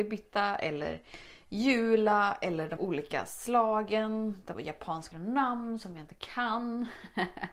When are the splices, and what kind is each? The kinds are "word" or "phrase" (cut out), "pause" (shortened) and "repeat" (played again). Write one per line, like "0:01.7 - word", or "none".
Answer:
0:02.8 - word
0:04.5 - phrase
0:05.1 - phrase

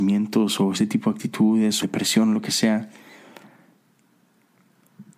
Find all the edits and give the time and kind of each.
0:01.8 - phrase

